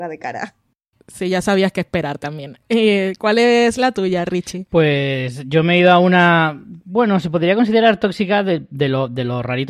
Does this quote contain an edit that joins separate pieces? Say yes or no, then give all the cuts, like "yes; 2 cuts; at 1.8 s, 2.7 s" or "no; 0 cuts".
no; 0 cuts